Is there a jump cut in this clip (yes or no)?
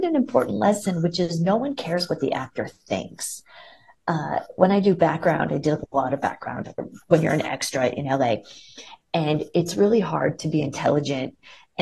no